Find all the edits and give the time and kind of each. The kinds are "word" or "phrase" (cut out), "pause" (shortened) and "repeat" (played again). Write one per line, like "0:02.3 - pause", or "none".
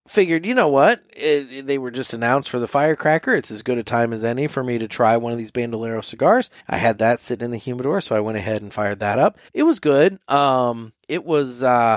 0:06.6 - pause
0:09.5 - pause
0:11.0 - pause